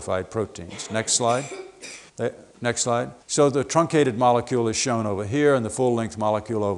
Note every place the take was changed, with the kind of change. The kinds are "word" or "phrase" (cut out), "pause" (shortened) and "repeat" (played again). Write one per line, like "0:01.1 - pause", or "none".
0:02.1 - pause
0:03.2 - pause

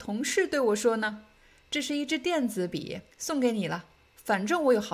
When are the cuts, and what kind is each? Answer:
0:03.1 - pause

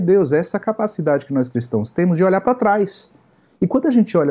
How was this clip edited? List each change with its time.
none

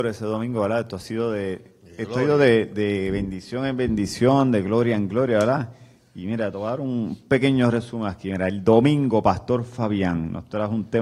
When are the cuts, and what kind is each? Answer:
none

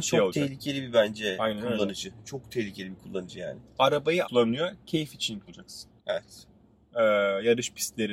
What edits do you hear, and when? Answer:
0:04.2 - phrase
0:05.5 - word
0:06.0 - pause

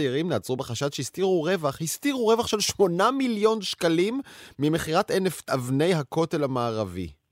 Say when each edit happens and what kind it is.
0:05.5 - word

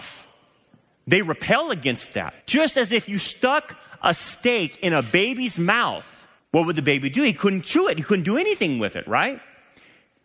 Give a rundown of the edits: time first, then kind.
0:02.4 - pause
0:06.4 - pause

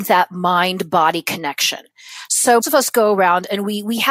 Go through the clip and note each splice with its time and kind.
0:02.6 - word

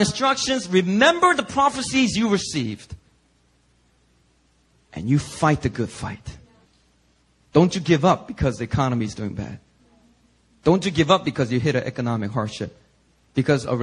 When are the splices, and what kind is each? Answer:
0:06.6 - pause

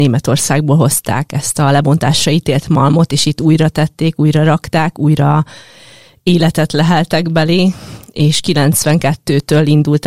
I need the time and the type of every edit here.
none

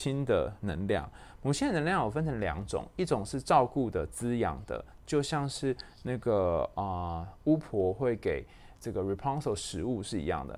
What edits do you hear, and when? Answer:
0:08.8 - pause

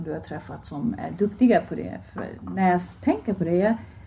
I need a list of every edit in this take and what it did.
none

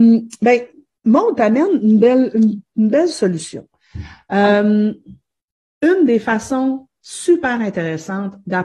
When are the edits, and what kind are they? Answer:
0:05.5 - pause

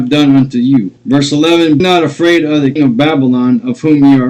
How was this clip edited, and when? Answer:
0:01.0 - pause
0:01.8 - word
0:02.8 - word

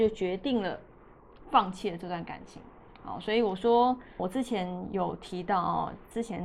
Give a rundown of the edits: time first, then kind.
0:04.2 - word

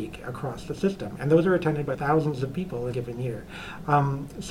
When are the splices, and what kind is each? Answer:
0:01.9 - word
0:02.9 - word

